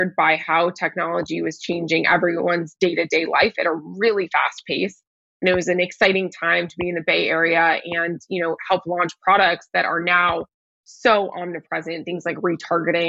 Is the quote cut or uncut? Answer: uncut